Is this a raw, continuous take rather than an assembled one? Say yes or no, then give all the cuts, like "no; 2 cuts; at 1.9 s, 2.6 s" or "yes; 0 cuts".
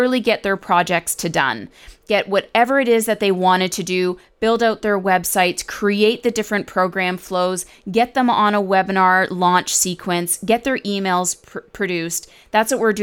yes; 0 cuts